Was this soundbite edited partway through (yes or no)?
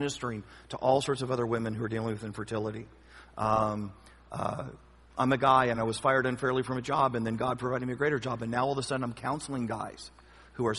no